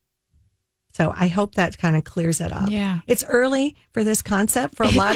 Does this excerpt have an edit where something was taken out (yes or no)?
no